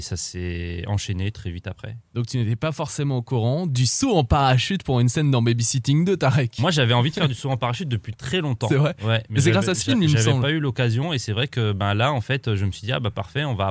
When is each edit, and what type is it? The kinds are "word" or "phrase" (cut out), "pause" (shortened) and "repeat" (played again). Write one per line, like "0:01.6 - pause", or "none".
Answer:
none